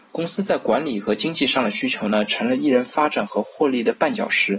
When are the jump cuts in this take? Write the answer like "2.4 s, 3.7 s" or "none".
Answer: none